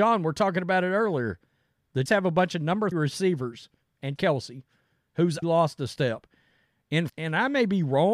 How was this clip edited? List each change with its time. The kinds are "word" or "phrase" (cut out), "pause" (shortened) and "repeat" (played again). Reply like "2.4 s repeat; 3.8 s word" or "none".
2.1 s word; 2.9 s word; 4.2 s word; 5.4 s word; 7.1 s word